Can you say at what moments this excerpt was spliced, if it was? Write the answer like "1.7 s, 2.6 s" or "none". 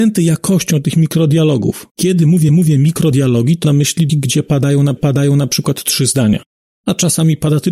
1.9 s, 2.5 s, 3.6 s, 4.1 s, 5.0 s, 6.5 s